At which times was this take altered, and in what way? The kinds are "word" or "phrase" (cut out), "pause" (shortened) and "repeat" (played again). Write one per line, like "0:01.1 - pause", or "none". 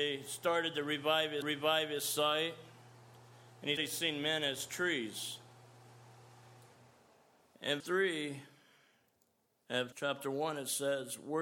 0:01.4 - repeat
0:03.8 - word
0:07.8 - word
0:09.9 - word